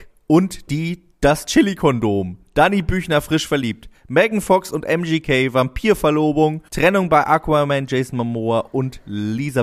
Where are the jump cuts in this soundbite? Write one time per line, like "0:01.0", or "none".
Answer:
0:06.7